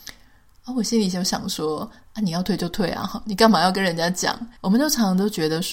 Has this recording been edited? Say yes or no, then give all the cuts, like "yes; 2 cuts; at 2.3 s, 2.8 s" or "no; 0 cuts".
yes; 1 cut; at 4.6 s